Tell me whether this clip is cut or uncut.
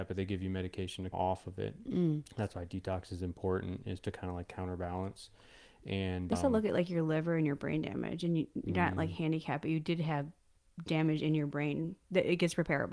cut